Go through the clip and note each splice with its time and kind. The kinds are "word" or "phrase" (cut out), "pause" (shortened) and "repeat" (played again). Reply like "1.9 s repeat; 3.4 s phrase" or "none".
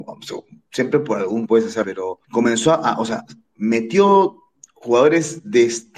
1.5 s word; 1.8 s word; 2.2 s pause